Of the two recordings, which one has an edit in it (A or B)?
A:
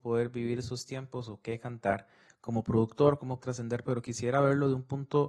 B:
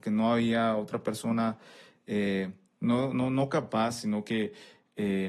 A